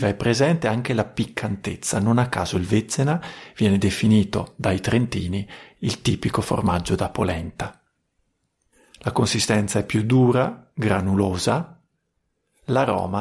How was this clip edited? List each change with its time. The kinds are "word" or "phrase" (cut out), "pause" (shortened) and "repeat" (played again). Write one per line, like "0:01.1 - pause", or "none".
none